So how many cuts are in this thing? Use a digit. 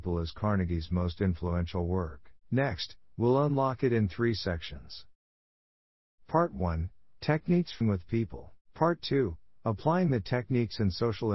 3